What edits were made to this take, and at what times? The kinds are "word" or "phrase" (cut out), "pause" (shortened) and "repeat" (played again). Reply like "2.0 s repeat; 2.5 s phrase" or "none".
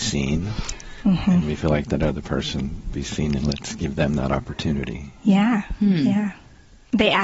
2.9 s phrase